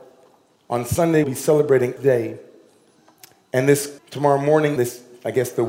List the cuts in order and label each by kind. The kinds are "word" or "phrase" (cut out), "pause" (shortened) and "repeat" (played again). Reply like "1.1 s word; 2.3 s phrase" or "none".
1.2 s word; 2.0 s word; 4.0 s word; 4.8 s word